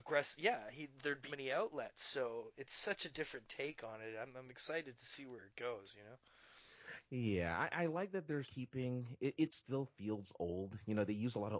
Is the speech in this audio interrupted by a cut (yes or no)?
yes